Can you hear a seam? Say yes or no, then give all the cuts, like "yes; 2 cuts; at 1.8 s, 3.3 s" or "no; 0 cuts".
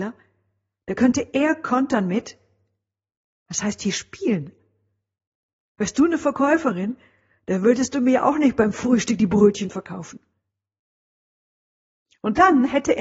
no; 0 cuts